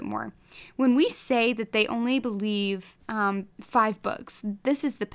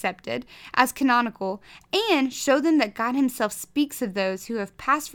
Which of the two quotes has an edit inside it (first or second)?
first